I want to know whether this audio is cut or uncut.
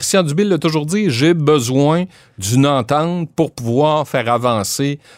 uncut